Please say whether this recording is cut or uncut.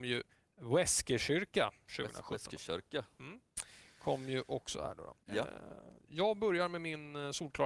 cut